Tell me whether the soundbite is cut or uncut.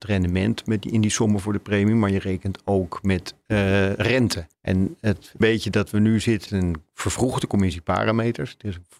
cut